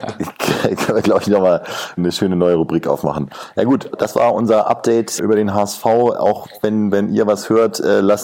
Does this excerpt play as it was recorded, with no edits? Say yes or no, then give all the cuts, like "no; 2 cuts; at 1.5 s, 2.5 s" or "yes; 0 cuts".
no; 3 cuts; at 2.0 s, 3.9 s, 5.2 s